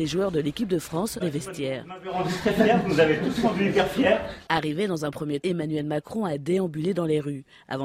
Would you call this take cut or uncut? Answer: cut